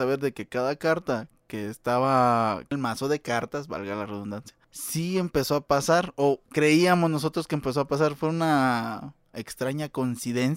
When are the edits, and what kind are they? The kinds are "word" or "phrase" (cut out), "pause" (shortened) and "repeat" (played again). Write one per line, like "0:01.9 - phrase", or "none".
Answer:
0:02.7 - word
0:04.6 - pause